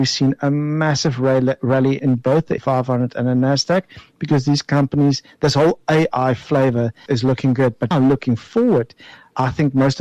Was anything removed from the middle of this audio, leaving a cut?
yes; 4 cuts; at 2.0 s, 2.6 s, 7.1 s, 7.9 s

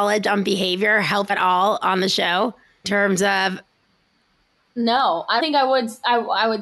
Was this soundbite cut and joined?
yes; 3 cuts; at 1.3 s, 2.8 s, 5.4 s

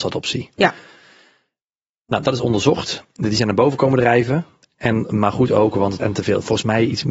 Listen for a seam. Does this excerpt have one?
yes; 1 cut; at 6.0 s

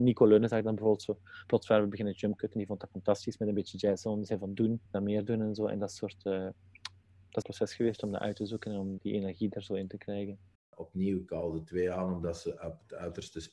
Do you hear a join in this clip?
yes; 4 cuts; at 4.9 s, 7.4 s, 9.0 s, 10.6 s

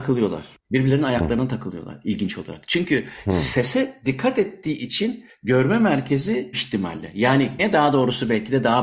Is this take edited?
yes; 2 cuts; at 6.5 s, 7.6 s

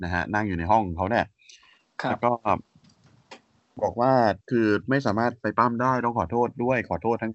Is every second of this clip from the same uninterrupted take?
no; 1 cut; at 4.4 s

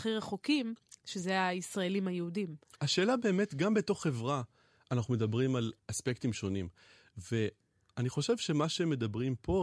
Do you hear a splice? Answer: yes; 1 cut; at 2.7 s

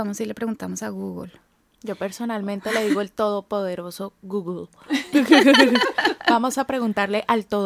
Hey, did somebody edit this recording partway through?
no; 0 cuts

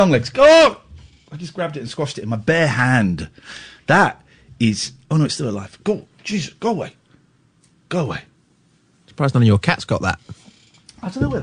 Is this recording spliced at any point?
no; 0 cuts

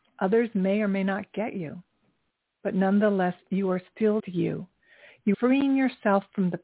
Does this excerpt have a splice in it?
yes; 2 cuts; at 4.2 s, 5.3 s

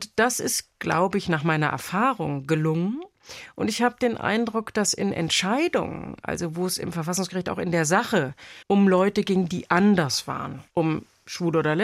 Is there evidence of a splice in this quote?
yes; 2 cuts; at 8.6 s, 10.7 s

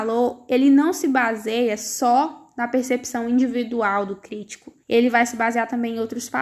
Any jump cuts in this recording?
yes; 1 cut; at 4.8 s

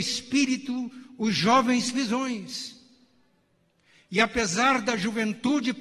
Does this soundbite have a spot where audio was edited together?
yes; 1 cut; at 1.9 s

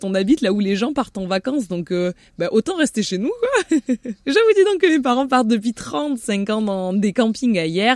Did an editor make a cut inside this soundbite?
no; 0 cuts

